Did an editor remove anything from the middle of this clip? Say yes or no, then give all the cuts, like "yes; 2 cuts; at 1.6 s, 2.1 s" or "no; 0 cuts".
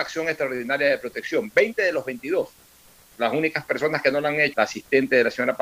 yes; 1 cut; at 4.5 s